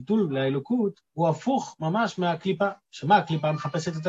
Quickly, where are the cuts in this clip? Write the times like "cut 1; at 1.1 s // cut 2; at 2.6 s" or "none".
cut 1; at 1.1 s